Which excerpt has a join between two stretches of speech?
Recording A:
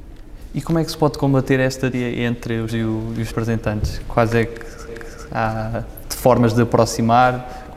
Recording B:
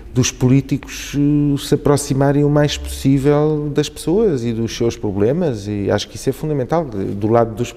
A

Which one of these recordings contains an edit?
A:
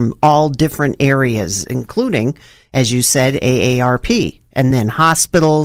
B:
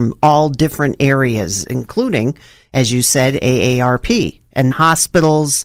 B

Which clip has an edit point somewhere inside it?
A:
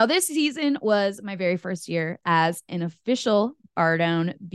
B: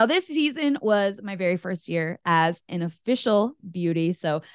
B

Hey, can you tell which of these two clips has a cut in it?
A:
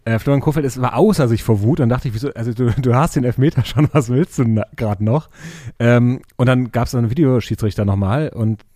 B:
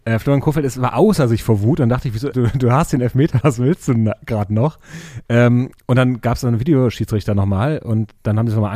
B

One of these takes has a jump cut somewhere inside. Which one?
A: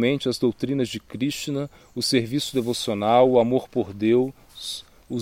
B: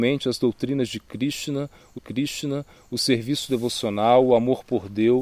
B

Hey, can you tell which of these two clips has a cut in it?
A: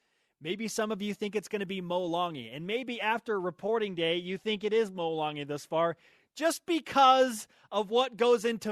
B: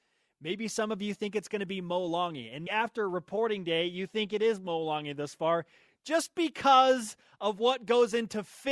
B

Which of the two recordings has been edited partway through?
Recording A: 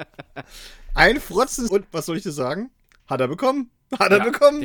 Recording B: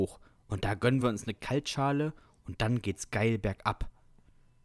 A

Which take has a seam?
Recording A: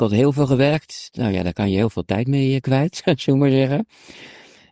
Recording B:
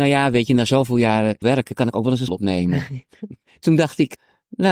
B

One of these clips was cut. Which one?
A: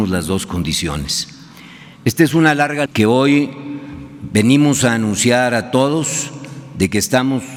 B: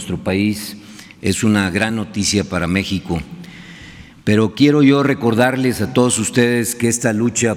A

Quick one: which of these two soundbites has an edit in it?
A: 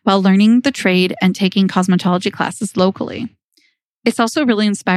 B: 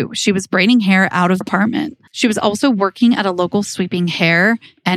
B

